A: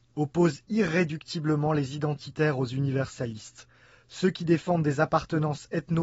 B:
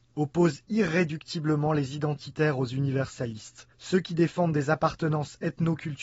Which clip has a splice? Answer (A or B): B